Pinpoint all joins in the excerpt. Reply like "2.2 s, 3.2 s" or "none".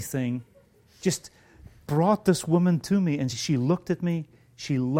1.9 s, 3.3 s

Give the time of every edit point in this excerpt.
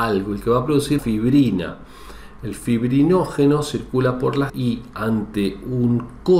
1.0 s, 4.5 s

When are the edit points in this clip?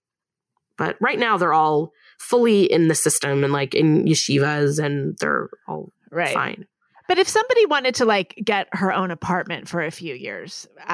none

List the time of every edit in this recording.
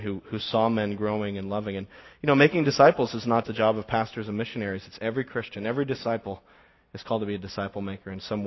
3.4 s

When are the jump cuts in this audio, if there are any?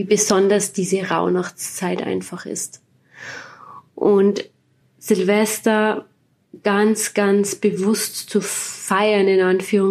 4.8 s

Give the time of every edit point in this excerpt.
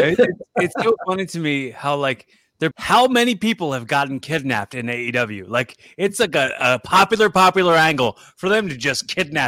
2.7 s

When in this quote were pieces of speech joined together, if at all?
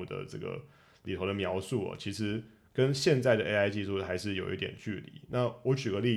none

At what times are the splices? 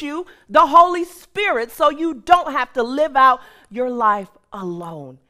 none

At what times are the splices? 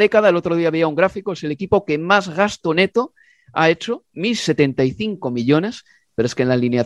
none

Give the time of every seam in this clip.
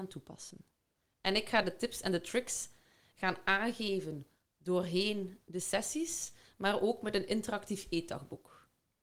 1.6 s

